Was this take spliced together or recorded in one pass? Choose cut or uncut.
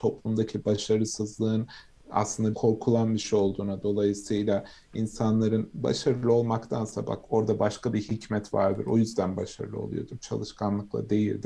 cut